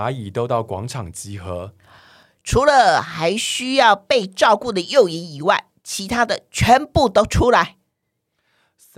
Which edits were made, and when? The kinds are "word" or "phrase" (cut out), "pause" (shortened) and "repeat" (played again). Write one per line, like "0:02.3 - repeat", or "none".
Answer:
none